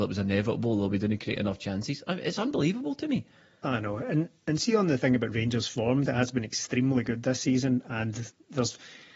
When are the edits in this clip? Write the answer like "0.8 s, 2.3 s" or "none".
6.1 s